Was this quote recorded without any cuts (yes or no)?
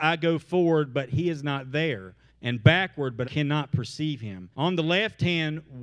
no